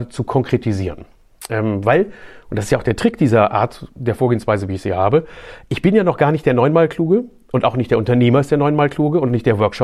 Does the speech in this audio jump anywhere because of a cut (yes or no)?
no